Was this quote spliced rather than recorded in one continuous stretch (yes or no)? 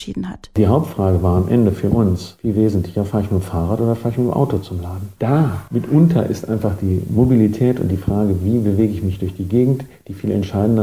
no